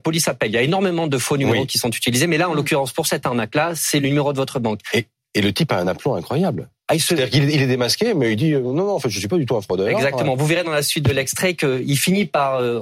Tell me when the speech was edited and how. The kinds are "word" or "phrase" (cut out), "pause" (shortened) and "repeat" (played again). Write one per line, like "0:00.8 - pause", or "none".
none